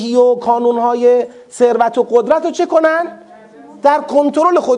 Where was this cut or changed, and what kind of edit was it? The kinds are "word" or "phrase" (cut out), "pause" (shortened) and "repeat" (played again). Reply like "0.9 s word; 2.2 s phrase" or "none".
none

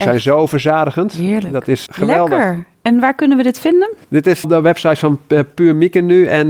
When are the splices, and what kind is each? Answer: 1.9 s word; 4.0 s pause; 4.4 s word

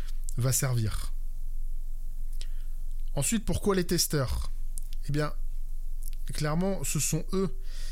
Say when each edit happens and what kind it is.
none

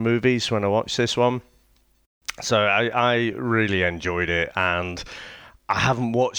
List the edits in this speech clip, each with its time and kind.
none

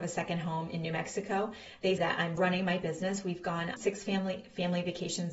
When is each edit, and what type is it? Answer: 2.0 s word; 2.4 s word; 3.8 s word

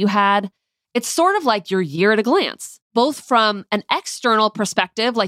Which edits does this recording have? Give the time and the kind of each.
2.8 s pause

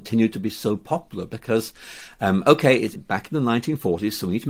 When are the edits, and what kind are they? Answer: 3.0 s phrase

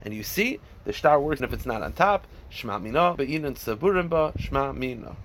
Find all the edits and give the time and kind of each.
1.4 s word; 3.1 s word

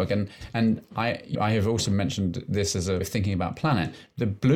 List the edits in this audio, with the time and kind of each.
1.3 s word; 3.0 s word

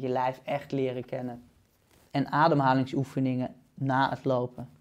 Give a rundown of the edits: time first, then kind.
none

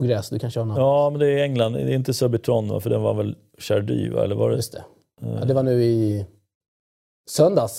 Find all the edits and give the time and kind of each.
none

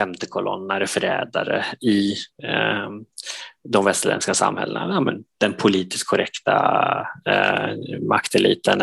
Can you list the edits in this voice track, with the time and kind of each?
2.3 s pause

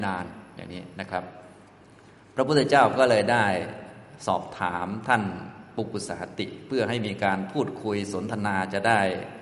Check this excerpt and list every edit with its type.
1.8 s pause

